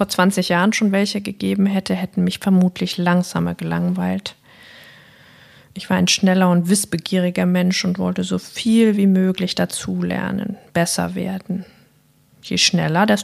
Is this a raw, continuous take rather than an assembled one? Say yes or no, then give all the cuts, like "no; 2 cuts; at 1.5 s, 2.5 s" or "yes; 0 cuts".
yes; 0 cuts